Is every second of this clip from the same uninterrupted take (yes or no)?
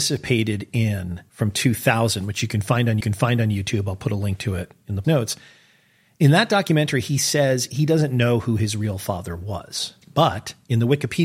no